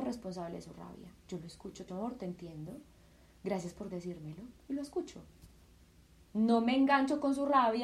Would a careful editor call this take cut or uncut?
cut